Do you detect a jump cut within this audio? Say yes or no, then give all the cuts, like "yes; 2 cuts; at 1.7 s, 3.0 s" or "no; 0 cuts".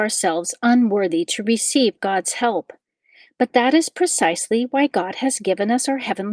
no; 0 cuts